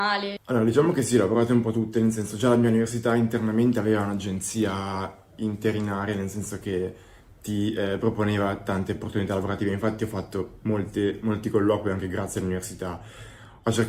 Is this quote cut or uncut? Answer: uncut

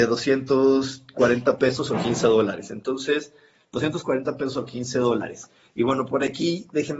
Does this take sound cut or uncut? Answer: uncut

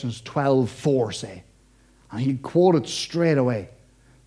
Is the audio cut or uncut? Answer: uncut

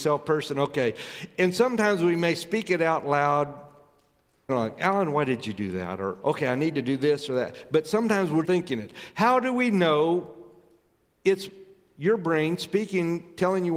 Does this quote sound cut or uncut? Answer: cut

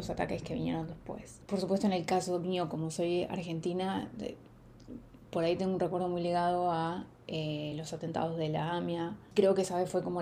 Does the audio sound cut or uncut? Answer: uncut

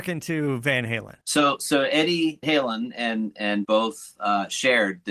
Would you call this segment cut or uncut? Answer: cut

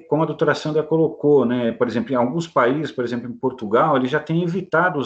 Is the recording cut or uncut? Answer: uncut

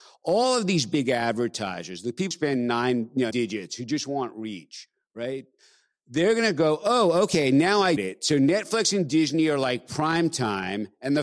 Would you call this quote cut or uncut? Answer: cut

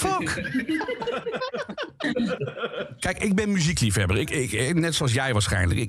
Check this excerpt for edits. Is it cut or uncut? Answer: uncut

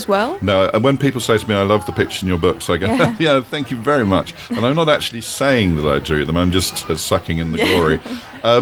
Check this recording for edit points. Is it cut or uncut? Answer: uncut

